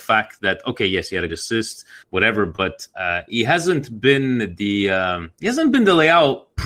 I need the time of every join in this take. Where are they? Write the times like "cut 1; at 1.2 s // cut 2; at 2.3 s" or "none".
cut 1; at 1.3 s // cut 2; at 2.0 s // cut 3; at 2.9 s // cut 4; at 5.4 s